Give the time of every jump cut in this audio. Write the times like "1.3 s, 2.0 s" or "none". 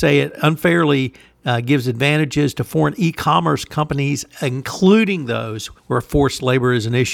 5.8 s